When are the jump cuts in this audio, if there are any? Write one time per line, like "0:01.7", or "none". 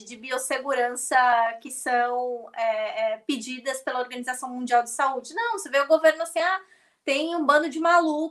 none